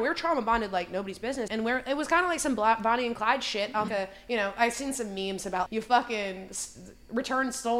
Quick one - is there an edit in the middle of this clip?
yes; 3 cuts; at 1.5 s, 3.9 s, 5.7 s

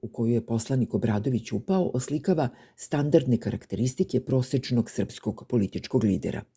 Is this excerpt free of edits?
yes; 0 cuts

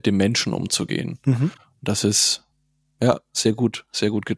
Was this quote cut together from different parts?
no; 0 cuts

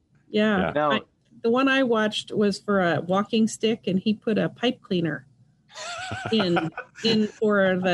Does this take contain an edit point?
no; 0 cuts

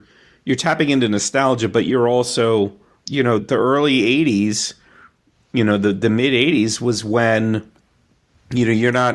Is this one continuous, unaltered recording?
no; 1 cut; at 3.4 s

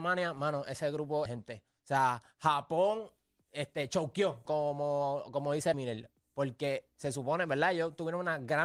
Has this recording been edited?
yes; 3 cuts; at 1.3 s, 4.5 s, 5.7 s

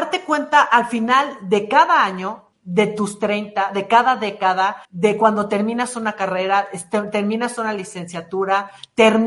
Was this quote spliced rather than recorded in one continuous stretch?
yes; 1 cut; at 4.8 s

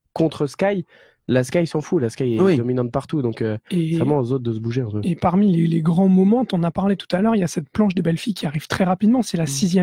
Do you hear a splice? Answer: no; 0 cuts

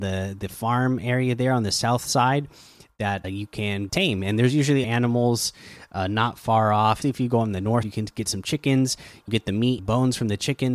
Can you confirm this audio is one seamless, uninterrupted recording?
no; 7 cuts; at 3.2 s, 3.9 s, 4.8 s, 7.0 s, 7.8 s, 9.3 s, 9.8 s

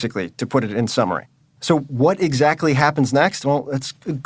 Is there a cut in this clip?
no; 0 cuts

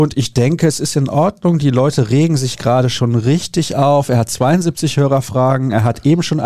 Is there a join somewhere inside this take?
no; 0 cuts

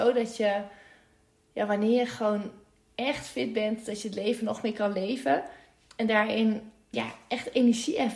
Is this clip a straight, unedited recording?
no; 1 cut; at 6.9 s

